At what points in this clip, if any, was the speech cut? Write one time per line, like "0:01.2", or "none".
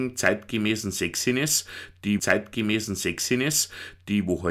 0:02.2